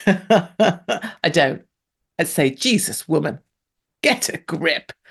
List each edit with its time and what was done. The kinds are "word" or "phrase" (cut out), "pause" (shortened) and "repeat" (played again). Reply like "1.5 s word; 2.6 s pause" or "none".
none